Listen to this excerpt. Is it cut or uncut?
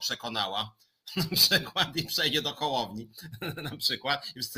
uncut